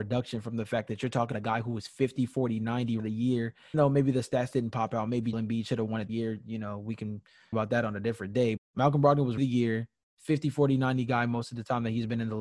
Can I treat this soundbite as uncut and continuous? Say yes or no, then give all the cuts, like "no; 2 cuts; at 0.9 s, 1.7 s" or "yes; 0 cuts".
no; 8 cuts; at 1.3 s, 3.0 s, 3.7 s, 5.3 s, 6.1 s, 7.5 s, 8.6 s, 9.4 s